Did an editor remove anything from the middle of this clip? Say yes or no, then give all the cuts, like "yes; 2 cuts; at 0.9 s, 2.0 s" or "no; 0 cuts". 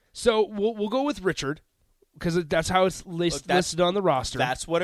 no; 0 cuts